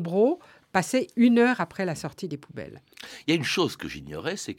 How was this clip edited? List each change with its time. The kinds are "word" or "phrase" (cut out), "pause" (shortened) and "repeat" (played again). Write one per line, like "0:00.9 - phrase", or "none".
none